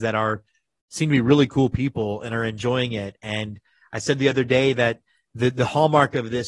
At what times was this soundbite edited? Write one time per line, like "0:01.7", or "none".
none